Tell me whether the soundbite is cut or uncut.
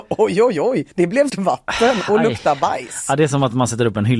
cut